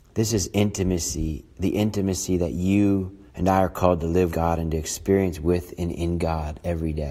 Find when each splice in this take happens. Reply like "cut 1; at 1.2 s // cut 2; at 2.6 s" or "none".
cut 1; at 3.3 s // cut 2; at 4.3 s